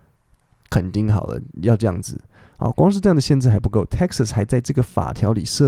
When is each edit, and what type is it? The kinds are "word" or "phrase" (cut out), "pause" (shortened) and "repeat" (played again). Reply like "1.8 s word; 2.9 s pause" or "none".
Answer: none